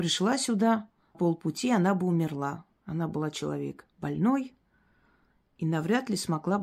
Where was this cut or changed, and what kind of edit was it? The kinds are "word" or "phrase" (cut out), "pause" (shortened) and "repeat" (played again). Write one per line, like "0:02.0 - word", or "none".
0:01.1 - word
0:03.9 - pause